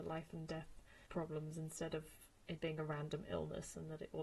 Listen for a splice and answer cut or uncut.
cut